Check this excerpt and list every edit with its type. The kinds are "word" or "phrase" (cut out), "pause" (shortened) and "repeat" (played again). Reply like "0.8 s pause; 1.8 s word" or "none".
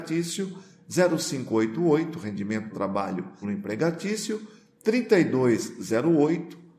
2.7 s word; 3.4 s phrase